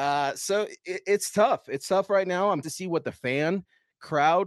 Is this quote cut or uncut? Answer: cut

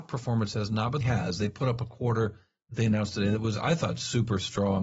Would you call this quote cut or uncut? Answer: cut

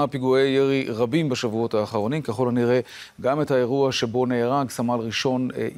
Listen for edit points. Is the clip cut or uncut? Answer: uncut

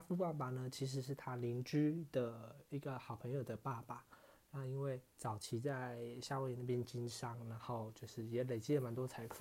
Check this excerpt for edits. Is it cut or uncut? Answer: cut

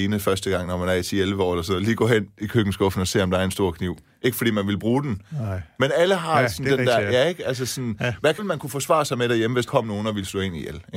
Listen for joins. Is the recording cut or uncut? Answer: cut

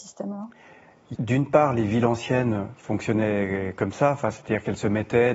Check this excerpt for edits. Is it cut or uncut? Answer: cut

